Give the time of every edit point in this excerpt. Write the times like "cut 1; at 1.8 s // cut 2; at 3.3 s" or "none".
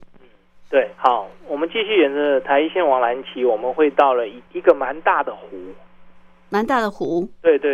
cut 1; at 1.0 s